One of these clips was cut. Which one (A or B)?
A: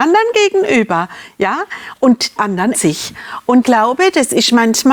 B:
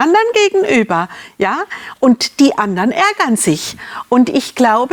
A